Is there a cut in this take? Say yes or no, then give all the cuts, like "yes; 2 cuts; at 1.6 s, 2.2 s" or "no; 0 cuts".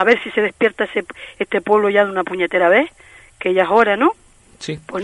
no; 0 cuts